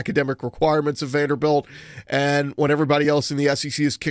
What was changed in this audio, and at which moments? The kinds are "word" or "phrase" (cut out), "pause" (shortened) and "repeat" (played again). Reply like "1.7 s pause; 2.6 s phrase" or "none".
none